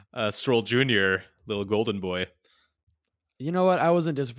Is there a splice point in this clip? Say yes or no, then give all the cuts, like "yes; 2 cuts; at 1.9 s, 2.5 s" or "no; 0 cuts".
no; 0 cuts